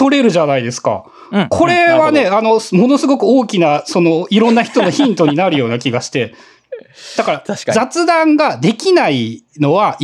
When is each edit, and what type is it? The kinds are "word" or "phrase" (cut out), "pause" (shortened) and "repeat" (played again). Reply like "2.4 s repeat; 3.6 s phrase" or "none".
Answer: none